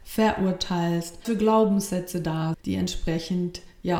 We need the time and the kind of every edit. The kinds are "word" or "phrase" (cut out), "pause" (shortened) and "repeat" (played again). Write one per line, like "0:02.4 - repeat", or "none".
0:01.2 - word
0:02.5 - word

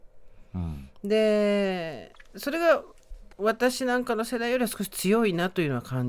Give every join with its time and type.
0:03.3 - pause

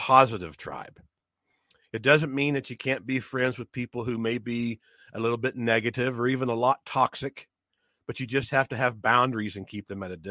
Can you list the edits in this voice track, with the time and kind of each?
none

